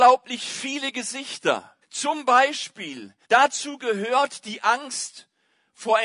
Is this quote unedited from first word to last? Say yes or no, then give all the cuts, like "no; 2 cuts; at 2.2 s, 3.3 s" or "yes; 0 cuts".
no; 2 cuts; at 1.8 s, 3.2 s